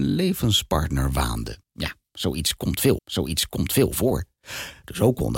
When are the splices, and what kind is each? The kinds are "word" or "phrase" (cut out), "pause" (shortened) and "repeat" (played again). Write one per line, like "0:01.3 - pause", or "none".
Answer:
0:01.6 - pause
0:03.0 - repeat